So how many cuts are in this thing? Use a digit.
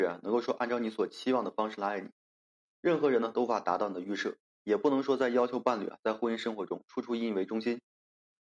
0